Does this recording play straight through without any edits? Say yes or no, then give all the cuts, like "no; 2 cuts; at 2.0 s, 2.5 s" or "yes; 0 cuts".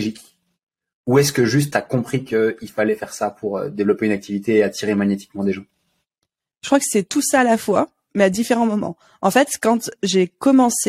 yes; 0 cuts